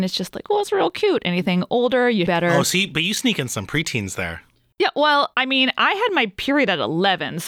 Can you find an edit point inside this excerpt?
yes; 3 cuts; at 2.3 s, 4.6 s, 5.3 s

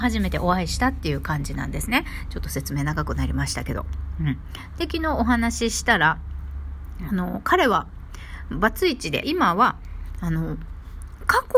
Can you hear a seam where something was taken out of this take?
yes; 1 cut; at 9.2 s

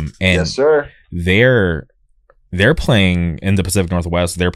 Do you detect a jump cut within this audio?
no; 0 cuts

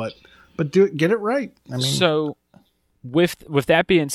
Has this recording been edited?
no; 0 cuts

